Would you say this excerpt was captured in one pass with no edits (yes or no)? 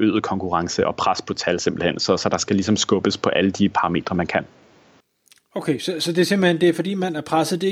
yes